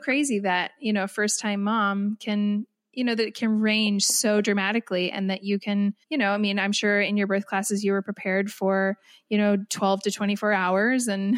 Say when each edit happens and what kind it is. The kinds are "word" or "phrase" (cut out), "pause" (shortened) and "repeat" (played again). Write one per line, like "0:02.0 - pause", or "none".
0:06.0 - pause